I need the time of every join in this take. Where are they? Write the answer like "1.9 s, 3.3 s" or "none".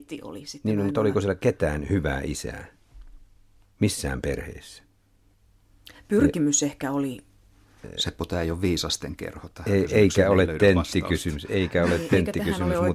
none